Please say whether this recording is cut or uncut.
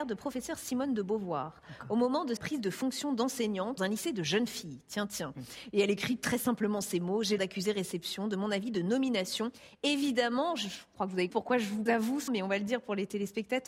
cut